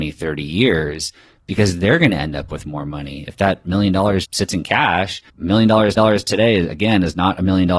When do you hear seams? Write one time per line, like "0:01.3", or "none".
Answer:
0:04.2
0:05.3
0:06.0